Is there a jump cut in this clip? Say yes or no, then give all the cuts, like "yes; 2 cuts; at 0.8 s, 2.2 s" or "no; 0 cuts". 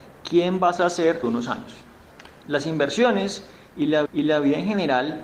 yes; 3 cuts; at 1.2 s, 2.4 s, 4.1 s